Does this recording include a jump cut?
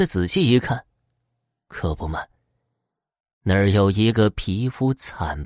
no; 0 cuts

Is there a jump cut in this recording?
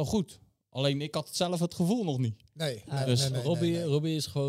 no; 0 cuts

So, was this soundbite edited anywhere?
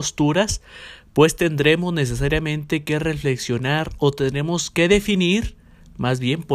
no; 0 cuts

